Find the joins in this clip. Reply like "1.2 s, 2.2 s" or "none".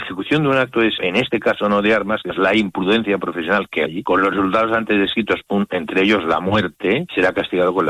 1.0 s, 3.9 s